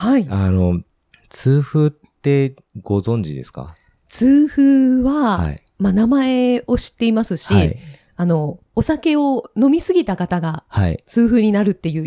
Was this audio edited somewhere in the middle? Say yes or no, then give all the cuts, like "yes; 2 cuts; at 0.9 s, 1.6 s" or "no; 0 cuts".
yes; 1 cut; at 1.1 s